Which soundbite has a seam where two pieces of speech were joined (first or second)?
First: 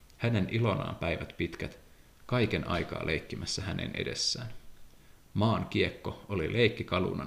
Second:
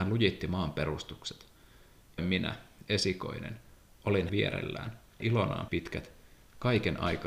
second